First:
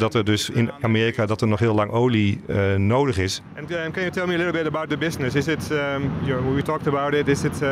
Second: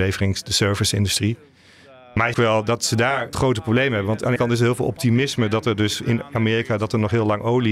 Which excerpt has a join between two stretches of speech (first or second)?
second